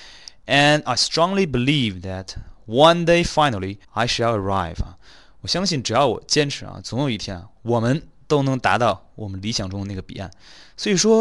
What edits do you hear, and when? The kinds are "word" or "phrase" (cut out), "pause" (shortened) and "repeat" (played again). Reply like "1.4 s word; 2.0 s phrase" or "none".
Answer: 3.8 s pause